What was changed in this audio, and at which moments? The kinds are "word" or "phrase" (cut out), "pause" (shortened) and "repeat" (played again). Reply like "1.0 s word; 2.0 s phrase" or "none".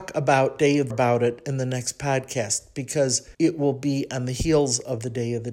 0.9 s phrase; 3.3 s pause